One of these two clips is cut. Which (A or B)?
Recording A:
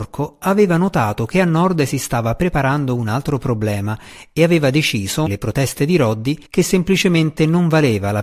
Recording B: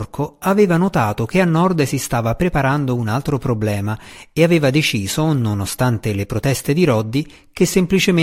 A